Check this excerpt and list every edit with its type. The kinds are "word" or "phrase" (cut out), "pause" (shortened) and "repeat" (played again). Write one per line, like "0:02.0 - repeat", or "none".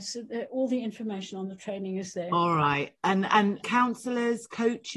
0:03.6 - word